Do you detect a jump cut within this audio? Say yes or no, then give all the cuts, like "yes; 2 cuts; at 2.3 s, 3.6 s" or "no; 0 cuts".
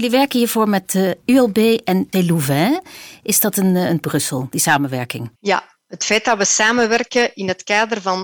yes; 3 cuts; at 2.1 s, 4.0 s, 5.4 s